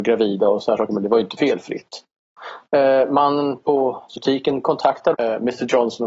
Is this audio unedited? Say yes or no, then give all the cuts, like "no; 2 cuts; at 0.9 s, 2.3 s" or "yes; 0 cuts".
no; 2 cuts; at 4.2 s, 5.1 s